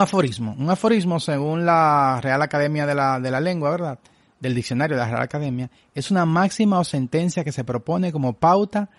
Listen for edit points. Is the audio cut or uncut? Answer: uncut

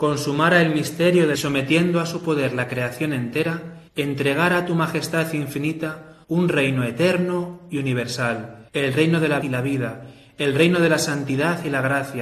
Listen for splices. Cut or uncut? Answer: cut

